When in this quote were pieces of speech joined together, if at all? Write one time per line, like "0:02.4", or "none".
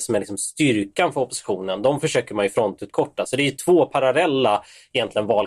none

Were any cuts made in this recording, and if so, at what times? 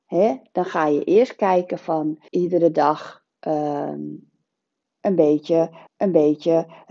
0:02.3
0:05.9

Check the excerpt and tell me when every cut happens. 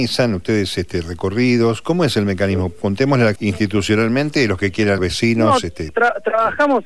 0:03.4
0:05.0

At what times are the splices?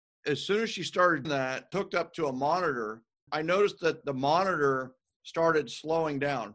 0:01.2
0:01.7
0:03.3
0:04.0

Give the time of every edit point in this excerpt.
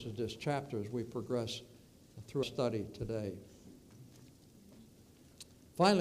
0:02.4

